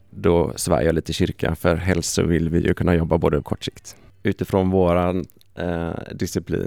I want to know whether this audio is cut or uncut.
cut